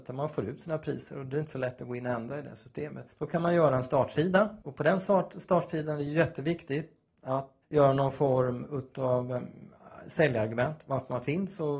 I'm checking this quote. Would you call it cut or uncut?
cut